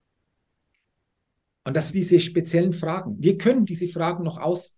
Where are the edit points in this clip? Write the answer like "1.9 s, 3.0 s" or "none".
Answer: 1.9 s, 3.6 s